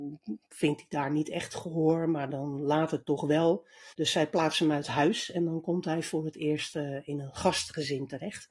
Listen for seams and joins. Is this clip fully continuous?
no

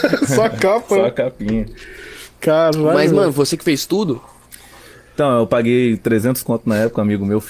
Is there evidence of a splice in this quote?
no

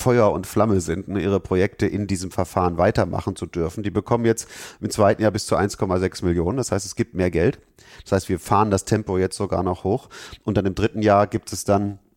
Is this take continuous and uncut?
yes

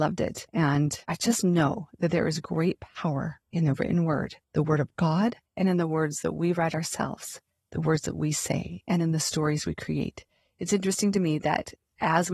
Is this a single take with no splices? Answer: no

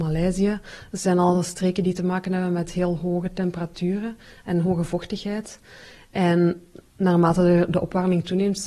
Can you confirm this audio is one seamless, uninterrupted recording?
yes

